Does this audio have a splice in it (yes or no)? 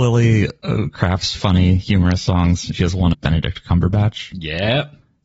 yes